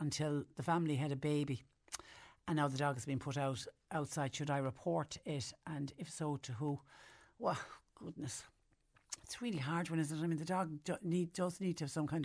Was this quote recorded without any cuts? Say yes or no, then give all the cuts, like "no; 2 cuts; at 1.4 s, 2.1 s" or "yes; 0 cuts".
yes; 0 cuts